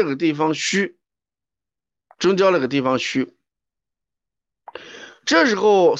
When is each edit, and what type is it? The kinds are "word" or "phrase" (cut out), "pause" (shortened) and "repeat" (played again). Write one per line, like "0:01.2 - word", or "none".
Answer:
none